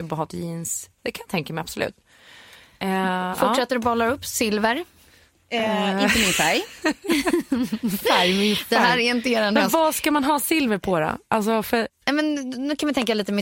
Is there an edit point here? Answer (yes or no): no